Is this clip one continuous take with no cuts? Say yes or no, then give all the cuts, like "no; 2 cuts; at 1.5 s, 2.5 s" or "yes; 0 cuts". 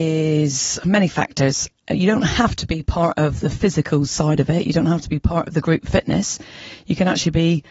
yes; 0 cuts